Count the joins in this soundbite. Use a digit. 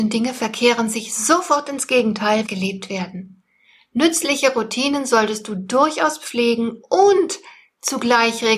1